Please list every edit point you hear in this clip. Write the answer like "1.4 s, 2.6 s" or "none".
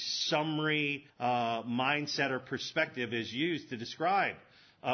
1.1 s